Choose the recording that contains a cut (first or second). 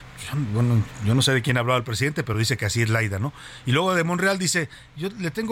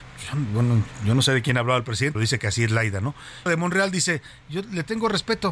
second